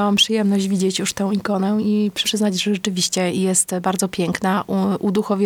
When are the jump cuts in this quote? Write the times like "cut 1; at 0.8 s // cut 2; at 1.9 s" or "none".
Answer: cut 1; at 2.2 s